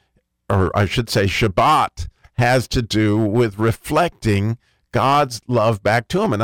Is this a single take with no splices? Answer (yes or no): yes